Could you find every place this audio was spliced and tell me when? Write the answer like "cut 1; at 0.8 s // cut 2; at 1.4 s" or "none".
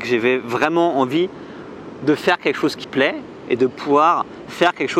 cut 1; at 2.8 s